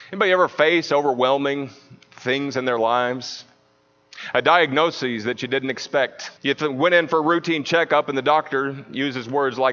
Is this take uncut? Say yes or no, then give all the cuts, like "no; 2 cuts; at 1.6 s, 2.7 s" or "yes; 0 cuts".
no; 1 cut; at 6.4 s